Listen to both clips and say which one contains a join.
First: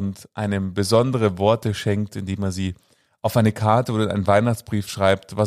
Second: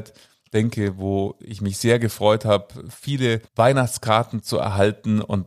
second; 1 cut; at 3.5 s

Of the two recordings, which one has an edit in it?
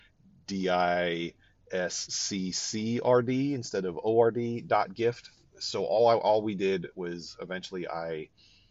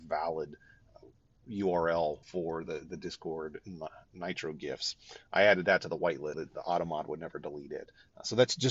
second; 2 cuts; at 2.2 s, 6.3 s

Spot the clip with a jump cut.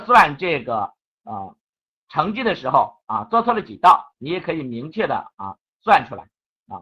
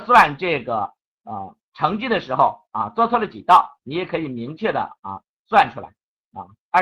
second; 1 cut; at 1.6 s

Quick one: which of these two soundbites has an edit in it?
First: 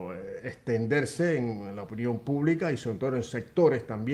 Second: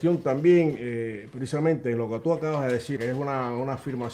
second; 1 cut; at 3.0 s

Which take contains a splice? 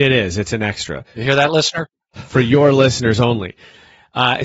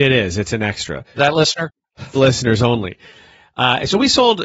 second; 2 cuts; at 1.2 s, 2.1 s

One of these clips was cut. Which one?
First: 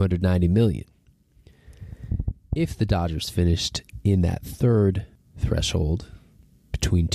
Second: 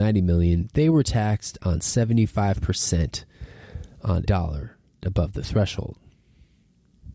second; 2 cuts; at 4.3 s, 5.0 s

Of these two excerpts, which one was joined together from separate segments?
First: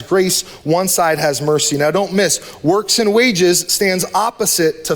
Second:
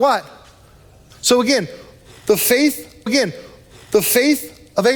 second; 1 cut; at 3.1 s

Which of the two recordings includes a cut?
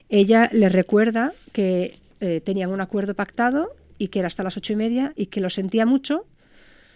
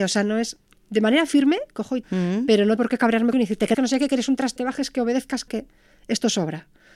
second; 6 cuts; at 2.0 s, 2.8 s, 3.3 s, 3.7 s, 4.6 s, 5.5 s

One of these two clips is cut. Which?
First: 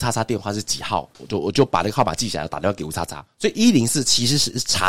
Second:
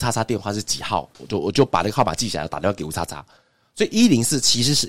first; 1 cut; at 3.3 s

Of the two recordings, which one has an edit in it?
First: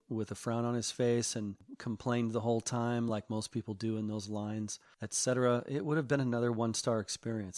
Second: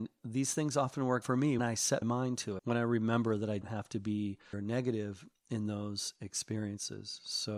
second; 6 cuts; at 1.2 s, 1.6 s, 2.0 s, 2.6 s, 3.6 s, 4.5 s

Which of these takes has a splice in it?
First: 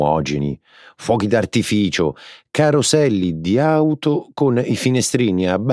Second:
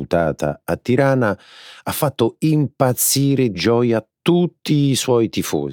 second; 1 cut; at 3.5 s

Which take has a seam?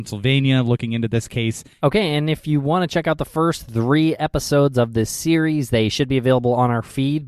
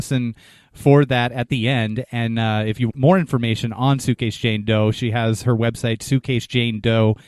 second; 1 cut; at 2.9 s

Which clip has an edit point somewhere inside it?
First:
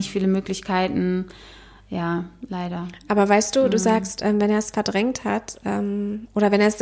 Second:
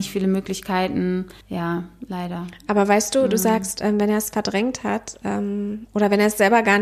second; 1 cut; at 1.4 s

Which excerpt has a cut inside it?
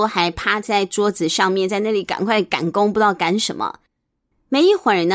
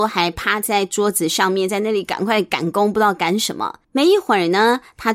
second; 1 cut; at 3.8 s

